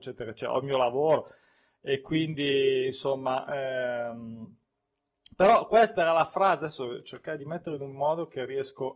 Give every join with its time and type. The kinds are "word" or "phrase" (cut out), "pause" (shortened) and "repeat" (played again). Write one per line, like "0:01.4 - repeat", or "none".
none